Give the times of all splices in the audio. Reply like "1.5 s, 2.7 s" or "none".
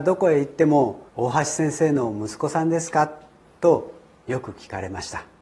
1.1 s